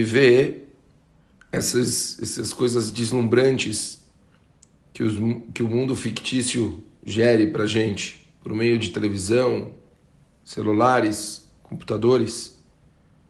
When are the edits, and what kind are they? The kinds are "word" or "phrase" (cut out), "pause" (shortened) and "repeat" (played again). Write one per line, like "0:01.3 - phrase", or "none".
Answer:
none

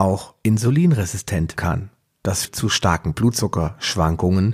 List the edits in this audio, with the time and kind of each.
0:01.6 - word
0:02.4 - word

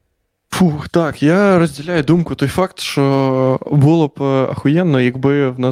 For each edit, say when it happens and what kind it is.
none

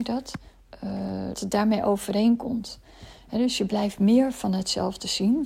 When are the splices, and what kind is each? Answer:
0:01.3 - word

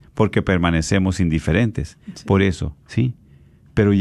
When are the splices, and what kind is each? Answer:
0:02.8 - pause

